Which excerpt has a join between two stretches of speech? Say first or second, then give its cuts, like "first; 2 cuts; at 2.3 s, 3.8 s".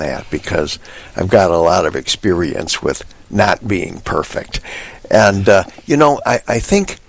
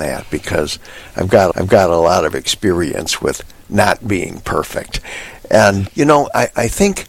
second; 2 cuts; at 1.5 s, 5.9 s